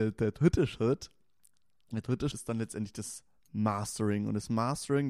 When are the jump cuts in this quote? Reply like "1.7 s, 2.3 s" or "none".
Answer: 2.3 s

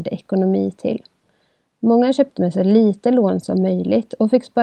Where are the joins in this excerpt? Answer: 2.4 s

